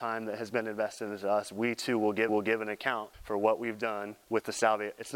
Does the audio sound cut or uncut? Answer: cut